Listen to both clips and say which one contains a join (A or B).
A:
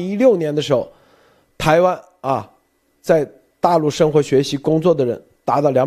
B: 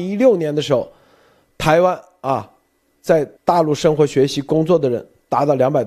B